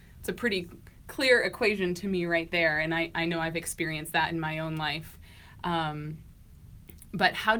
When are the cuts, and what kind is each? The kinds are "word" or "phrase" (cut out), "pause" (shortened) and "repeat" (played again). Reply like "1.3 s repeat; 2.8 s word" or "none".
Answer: none

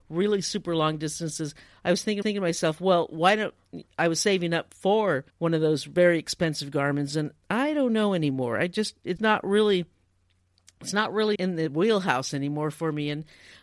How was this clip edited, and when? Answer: 2.2 s repeat; 5.3 s pause; 9.2 s word; 11.3 s word

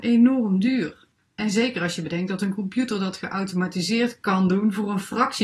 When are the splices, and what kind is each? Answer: 1.1 s pause

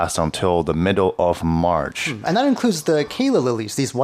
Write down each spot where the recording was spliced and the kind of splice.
none

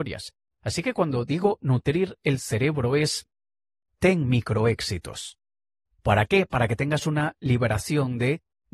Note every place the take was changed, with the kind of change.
none

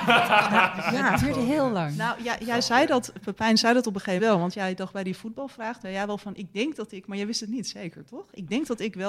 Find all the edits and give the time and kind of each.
4.2 s word; 5.8 s word

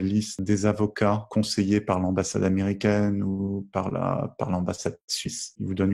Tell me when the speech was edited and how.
none

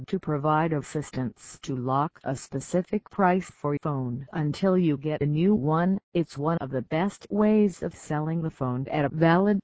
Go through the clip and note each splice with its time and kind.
3.8 s word; 6.0 s pause

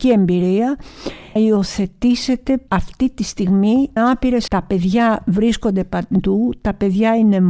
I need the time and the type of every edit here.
1.4 s word; 2.7 s word; 4.0 s word; 4.5 s word

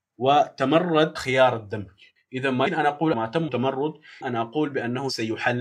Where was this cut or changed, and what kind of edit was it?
1.2 s word; 2.2 s pause; 2.7 s word; 3.1 s phrase; 3.5 s word; 4.2 s word

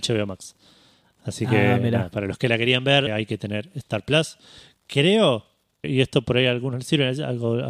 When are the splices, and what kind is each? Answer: 3.1 s word; 5.8 s word

